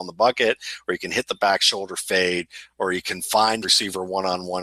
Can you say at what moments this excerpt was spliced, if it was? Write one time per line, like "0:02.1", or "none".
0:03.6